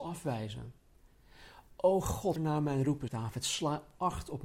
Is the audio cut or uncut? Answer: cut